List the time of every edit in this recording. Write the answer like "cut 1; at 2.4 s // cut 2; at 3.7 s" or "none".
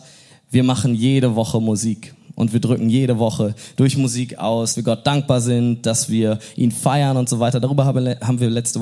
cut 1; at 4.7 s